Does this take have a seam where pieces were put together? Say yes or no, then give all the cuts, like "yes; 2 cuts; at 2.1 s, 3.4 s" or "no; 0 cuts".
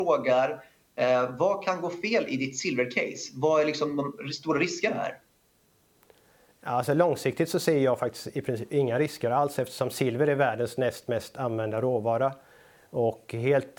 no; 0 cuts